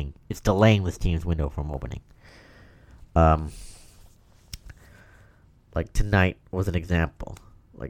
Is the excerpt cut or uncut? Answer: uncut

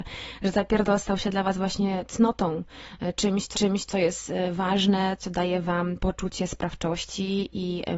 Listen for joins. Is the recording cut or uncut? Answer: cut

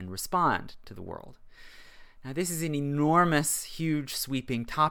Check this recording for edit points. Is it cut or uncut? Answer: uncut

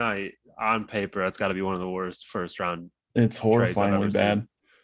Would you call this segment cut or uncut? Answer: uncut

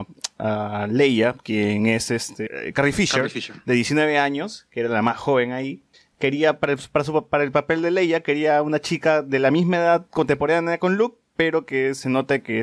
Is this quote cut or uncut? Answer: uncut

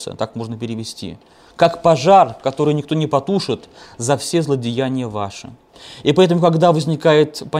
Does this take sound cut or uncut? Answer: uncut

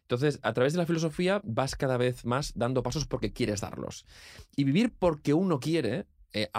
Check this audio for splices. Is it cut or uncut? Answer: uncut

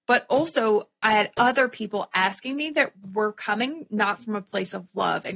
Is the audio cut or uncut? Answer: uncut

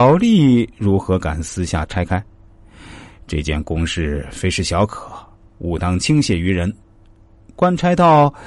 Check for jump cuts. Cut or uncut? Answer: uncut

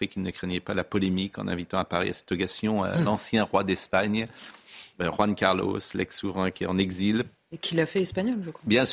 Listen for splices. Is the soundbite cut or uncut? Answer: uncut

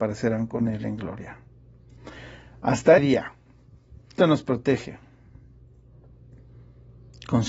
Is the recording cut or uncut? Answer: cut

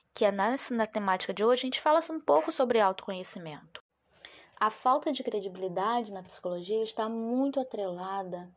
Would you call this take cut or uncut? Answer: uncut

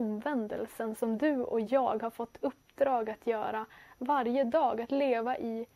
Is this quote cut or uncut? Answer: uncut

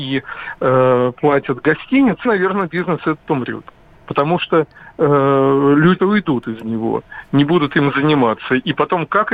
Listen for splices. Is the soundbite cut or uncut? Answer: cut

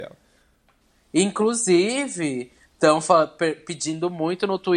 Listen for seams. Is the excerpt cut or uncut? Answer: uncut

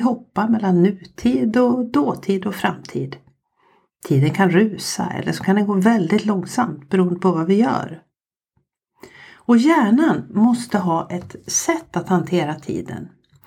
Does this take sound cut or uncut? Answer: uncut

